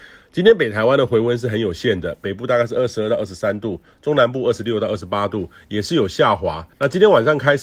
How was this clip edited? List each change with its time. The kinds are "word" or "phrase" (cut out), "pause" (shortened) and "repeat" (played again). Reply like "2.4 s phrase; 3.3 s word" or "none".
6.7 s pause